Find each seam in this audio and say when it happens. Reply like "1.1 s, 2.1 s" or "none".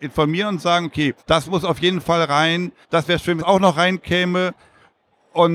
1.2 s, 2.8 s, 3.4 s